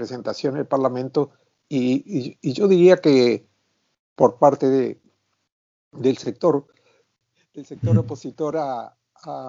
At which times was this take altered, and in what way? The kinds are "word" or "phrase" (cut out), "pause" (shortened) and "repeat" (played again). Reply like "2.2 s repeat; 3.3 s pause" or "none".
none